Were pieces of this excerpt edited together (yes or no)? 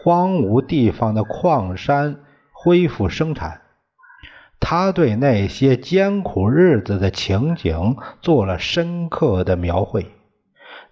no